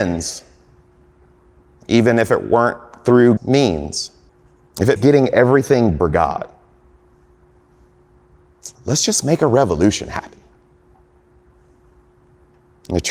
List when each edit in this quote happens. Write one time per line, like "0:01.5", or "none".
0:03.4
0:04.3
0:05.0
0:06.0
0:08.7